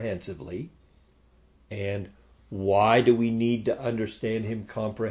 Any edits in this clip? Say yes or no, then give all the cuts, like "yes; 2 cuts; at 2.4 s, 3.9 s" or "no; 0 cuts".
no; 0 cuts